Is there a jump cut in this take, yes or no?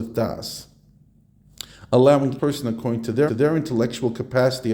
yes